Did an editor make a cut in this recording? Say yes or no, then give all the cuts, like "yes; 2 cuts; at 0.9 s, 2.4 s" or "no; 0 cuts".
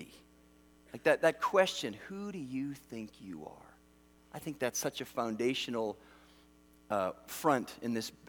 no; 0 cuts